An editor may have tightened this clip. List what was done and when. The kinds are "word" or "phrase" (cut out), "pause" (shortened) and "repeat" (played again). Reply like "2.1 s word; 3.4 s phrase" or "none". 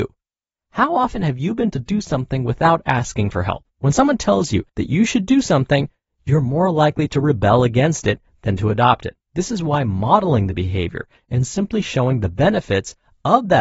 1.7 s word; 3.7 s pause; 4.7 s pause; 9.2 s pause